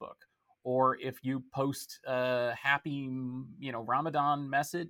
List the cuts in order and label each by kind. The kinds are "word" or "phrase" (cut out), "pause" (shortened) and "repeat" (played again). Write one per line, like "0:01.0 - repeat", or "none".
none